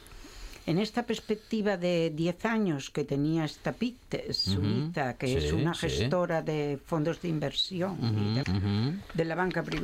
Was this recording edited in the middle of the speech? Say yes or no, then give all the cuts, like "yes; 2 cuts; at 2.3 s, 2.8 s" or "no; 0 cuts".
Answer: yes; 1 cut; at 8.4 s